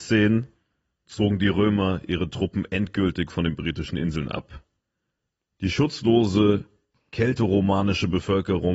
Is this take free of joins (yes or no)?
yes